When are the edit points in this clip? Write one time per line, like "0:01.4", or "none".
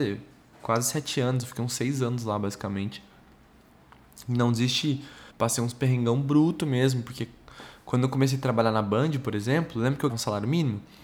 0:05.3
0:10.1